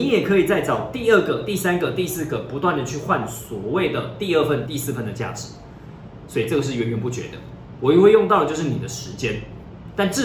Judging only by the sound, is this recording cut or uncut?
cut